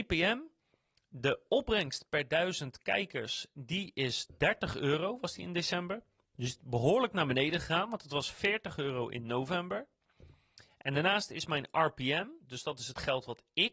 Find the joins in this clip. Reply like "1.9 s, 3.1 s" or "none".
none